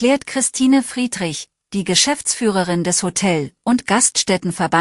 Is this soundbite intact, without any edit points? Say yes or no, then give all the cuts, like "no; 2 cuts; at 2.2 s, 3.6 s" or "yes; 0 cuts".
yes; 0 cuts